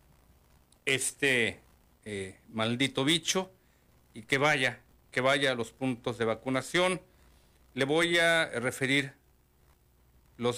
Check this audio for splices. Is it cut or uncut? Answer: uncut